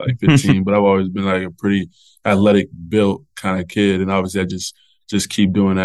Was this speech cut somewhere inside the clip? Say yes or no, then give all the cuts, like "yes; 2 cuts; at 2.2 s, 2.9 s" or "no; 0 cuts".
no; 0 cuts